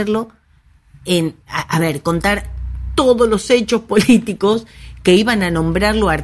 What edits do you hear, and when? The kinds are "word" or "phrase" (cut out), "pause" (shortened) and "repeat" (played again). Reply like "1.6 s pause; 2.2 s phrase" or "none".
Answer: 1.4 s pause